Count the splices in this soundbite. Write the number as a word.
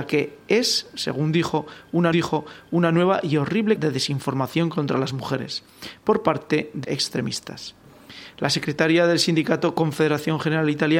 three